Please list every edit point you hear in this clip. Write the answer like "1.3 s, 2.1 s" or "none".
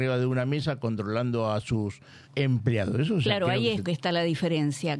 2.2 s, 3.8 s